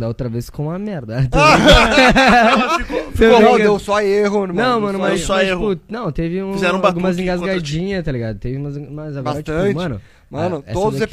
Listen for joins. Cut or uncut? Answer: uncut